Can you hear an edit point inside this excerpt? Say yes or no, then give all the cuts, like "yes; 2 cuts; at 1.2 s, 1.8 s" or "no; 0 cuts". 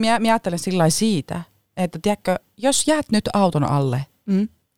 no; 0 cuts